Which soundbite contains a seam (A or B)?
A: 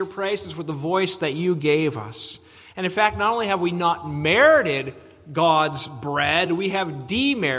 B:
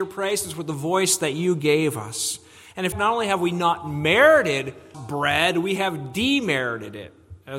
B